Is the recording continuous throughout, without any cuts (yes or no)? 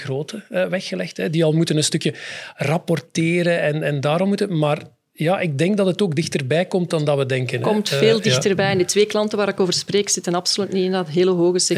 yes